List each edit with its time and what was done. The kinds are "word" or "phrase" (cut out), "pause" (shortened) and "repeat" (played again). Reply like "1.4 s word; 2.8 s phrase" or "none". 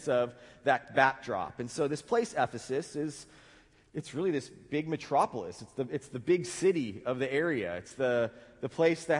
none